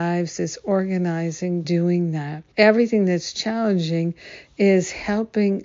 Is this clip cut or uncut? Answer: cut